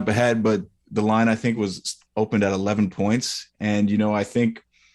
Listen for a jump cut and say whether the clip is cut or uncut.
uncut